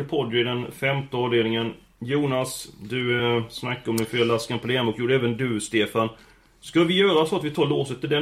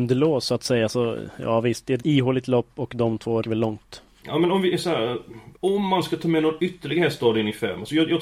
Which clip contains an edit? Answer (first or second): second